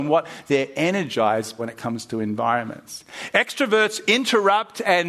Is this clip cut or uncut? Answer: cut